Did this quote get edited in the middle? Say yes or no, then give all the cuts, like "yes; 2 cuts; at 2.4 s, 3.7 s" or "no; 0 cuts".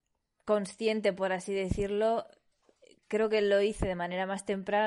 no; 0 cuts